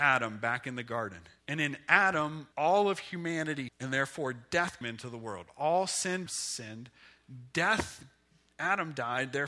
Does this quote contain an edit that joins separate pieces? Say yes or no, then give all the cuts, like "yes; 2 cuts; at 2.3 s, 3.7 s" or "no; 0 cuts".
yes; 5 cuts; at 1.4 s, 2.5 s, 3.7 s, 4.8 s, 6.3 s